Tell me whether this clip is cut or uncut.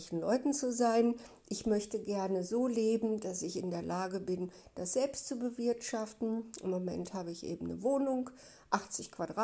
uncut